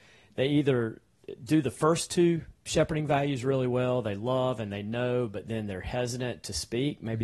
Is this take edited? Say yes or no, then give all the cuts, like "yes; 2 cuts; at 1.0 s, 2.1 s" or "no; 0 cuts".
no; 0 cuts